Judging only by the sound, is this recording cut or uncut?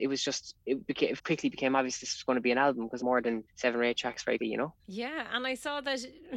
cut